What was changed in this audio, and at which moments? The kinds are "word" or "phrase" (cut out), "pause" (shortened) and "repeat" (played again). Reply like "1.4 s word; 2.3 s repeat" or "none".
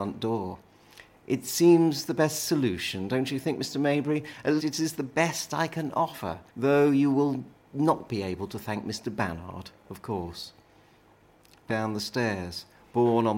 4.6 s word; 6.5 s pause; 11.7 s phrase